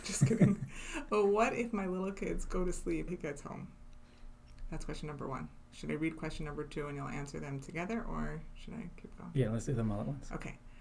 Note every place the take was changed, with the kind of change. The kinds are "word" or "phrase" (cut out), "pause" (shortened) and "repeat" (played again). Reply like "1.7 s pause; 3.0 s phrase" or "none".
3.1 s word